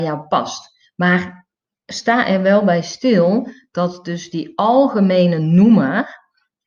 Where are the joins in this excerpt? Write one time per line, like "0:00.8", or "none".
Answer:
none